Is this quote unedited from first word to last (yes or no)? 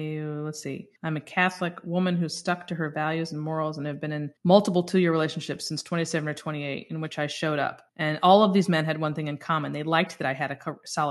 no